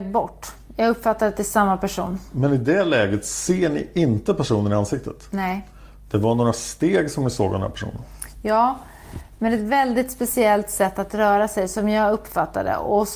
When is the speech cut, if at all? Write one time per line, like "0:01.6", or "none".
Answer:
none